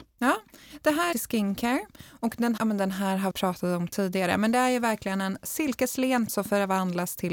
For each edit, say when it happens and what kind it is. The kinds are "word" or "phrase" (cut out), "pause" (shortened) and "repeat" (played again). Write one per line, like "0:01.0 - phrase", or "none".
0:01.1 - phrase
0:02.6 - word
0:03.3 - word
0:06.3 - word